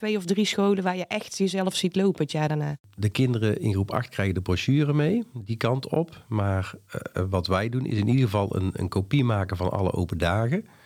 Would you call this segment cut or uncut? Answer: uncut